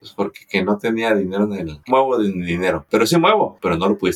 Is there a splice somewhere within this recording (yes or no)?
yes